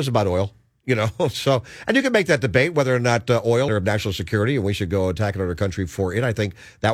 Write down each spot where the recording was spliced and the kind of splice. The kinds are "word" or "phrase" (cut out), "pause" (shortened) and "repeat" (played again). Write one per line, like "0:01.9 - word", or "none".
0:03.7 - phrase